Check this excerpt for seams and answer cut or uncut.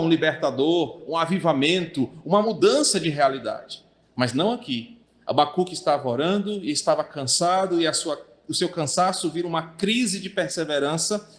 uncut